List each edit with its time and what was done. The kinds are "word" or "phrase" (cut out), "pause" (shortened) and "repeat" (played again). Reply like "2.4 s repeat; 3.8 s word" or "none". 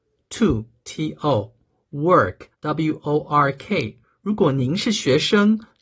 2.5 s pause; 4.0 s pause